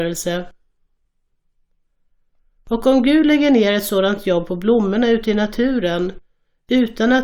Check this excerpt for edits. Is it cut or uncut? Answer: uncut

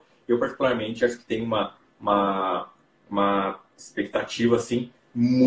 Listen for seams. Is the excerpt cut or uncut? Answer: uncut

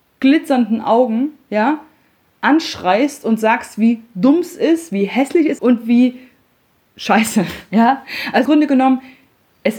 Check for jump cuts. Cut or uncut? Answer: cut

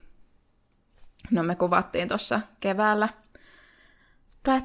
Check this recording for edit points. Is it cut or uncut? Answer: uncut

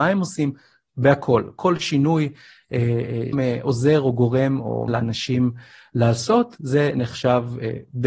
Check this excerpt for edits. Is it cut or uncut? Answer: cut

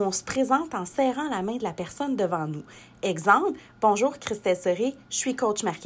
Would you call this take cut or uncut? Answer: uncut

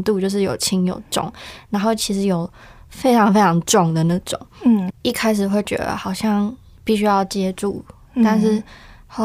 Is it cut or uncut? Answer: uncut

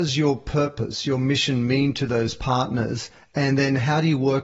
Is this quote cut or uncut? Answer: uncut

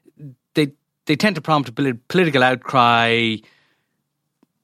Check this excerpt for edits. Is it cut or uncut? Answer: uncut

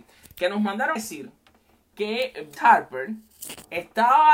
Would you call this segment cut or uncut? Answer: cut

